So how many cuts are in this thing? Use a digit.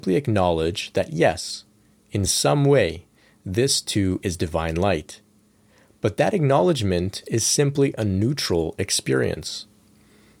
0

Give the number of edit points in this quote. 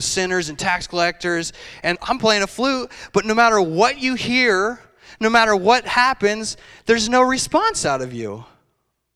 1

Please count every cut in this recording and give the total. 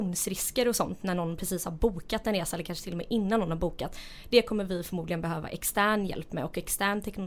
0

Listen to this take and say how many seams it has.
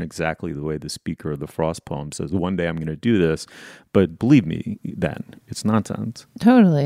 1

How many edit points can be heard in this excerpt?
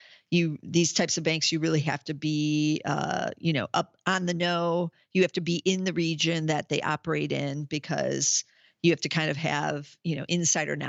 0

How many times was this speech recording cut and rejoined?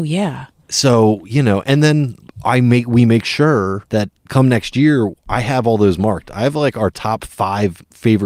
2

